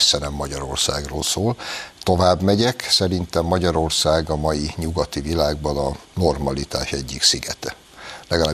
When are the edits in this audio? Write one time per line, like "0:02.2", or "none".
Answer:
0:06.0